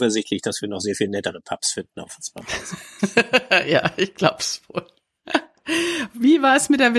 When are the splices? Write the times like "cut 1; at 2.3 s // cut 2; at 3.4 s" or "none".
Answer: none